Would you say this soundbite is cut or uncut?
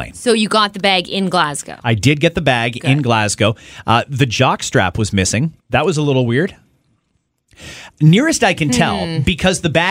cut